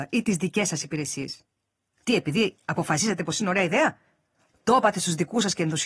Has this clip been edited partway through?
no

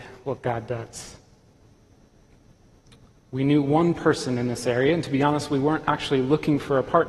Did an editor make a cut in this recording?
no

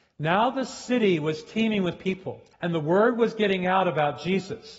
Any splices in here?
yes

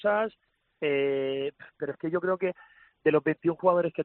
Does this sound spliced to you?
no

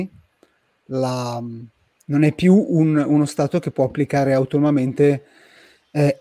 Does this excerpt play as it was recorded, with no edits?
yes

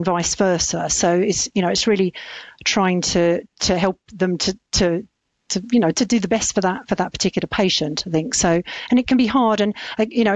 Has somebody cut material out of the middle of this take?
no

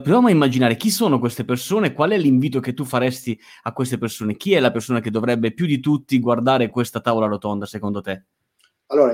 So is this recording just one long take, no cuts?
yes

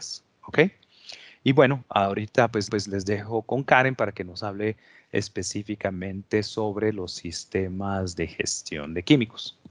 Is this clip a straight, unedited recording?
no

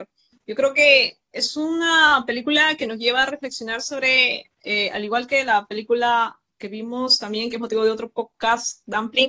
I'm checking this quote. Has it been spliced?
no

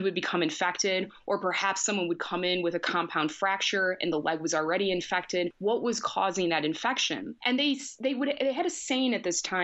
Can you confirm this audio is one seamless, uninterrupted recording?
yes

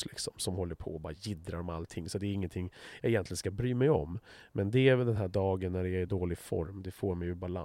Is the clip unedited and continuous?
yes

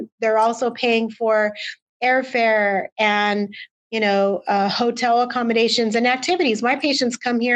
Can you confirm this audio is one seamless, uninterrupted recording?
yes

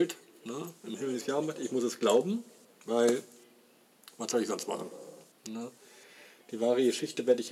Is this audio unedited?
yes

